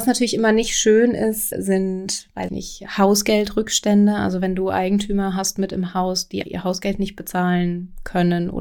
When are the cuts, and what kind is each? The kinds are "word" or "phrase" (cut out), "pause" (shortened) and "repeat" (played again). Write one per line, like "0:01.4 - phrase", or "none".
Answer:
0:01.5 - word
0:02.5 - word
0:06.4 - word